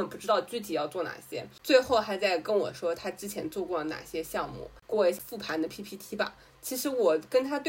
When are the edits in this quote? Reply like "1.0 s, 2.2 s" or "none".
none